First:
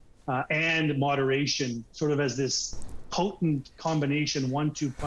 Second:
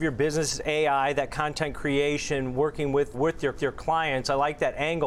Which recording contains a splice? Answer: second; 2 cuts; at 3.1 s, 3.5 s

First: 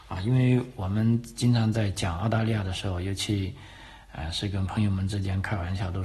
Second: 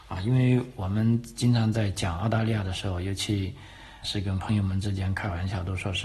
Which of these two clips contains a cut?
second; 1 cut; at 4.0 s

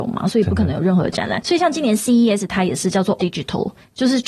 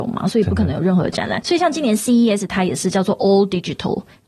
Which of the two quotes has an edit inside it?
first; 1 cut; at 3.2 s

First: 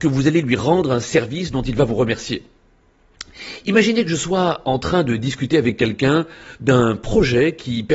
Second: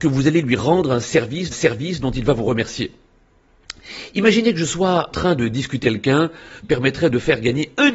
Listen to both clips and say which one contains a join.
second; 4 cuts; at 1.5 s, 5.1 s, 5.8 s, 6.6 s

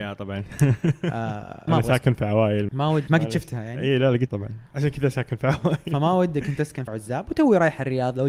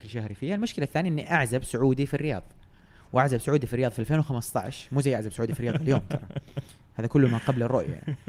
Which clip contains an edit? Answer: first; 5 cuts; at 1.7 s, 2.7 s, 3.1 s, 4.3 s, 6.9 s

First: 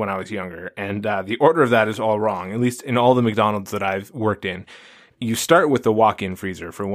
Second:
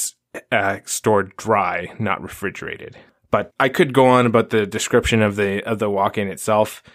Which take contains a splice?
second; 1 cut; at 3.5 s

